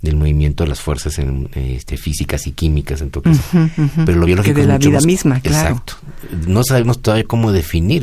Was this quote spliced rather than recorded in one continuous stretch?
no; 0 cuts

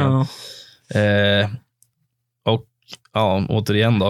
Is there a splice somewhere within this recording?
no; 0 cuts

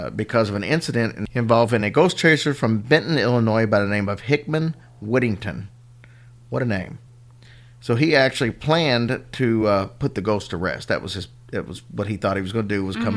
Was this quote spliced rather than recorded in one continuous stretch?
no; 0 cuts

